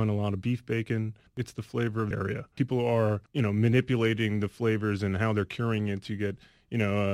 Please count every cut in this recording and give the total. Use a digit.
2